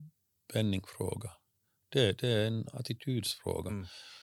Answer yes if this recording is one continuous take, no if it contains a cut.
yes